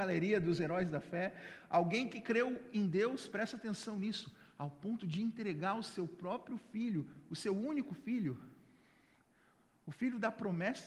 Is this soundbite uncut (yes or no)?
yes